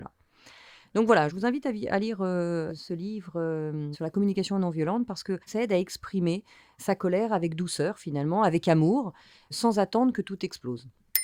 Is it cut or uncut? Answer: cut